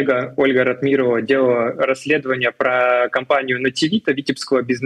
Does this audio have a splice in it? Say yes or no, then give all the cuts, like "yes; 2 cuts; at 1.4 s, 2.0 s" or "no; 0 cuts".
no; 0 cuts